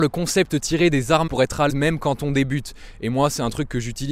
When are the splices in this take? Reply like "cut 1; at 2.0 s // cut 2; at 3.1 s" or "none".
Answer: cut 1; at 1.3 s // cut 2; at 1.7 s